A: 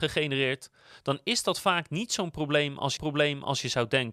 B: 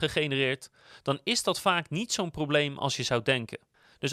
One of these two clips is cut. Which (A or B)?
A